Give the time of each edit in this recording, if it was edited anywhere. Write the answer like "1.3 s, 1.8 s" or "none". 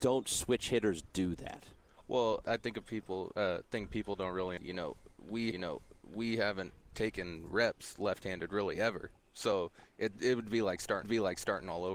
2.4 s, 4.6 s, 5.5 s, 8.2 s, 11.0 s